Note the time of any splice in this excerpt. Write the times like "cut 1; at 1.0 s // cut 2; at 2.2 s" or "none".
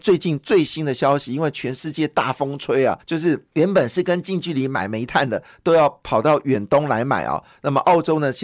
cut 1; at 3.0 s // cut 2; at 3.5 s